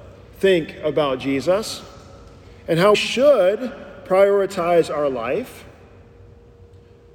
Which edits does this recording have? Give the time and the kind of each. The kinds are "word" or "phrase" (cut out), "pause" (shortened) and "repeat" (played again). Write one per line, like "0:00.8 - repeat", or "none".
0:02.9 - word